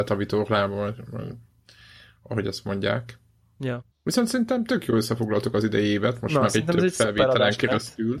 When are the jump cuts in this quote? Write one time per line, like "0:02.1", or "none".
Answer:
0:03.9